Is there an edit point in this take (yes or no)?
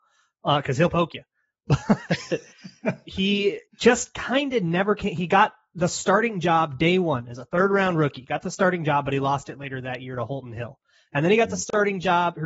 yes